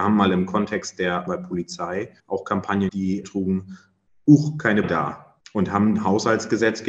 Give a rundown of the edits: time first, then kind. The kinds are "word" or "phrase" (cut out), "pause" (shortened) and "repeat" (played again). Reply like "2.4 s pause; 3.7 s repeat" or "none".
1.3 s word; 2.2 s pause; 2.9 s word; 3.2 s phrase; 4.8 s word; 5.4 s pause